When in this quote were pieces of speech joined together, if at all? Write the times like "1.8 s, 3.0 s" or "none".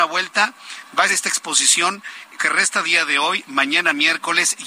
1.1 s, 2.4 s, 2.8 s